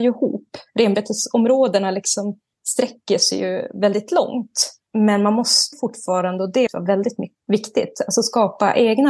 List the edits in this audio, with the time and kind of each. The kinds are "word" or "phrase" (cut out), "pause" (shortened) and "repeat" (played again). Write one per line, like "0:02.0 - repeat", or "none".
0:04.9 - pause
0:05.7 - word
0:06.7 - phrase